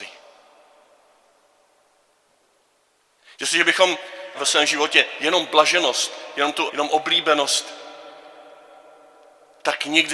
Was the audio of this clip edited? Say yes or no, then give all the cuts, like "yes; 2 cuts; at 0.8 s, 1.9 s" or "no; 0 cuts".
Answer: yes; 2 cuts; at 4.3 s, 6.7 s